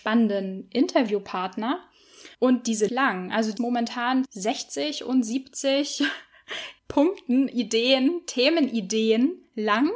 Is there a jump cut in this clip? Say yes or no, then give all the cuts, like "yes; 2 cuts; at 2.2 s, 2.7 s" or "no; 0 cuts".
yes; 5 cuts; at 2.3 s, 2.9 s, 3.6 s, 4.2 s, 6.8 s